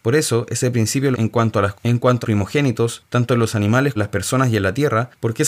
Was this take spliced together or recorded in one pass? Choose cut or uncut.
cut